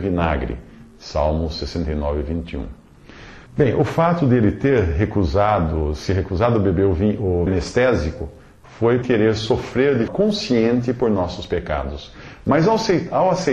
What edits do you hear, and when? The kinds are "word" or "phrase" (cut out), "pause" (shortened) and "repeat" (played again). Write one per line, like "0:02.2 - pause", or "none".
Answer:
0:03.5 - pause
0:07.5 - word
0:09.0 - word
0:10.1 - word